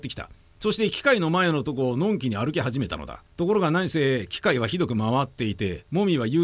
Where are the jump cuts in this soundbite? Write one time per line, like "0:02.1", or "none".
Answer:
0:03.3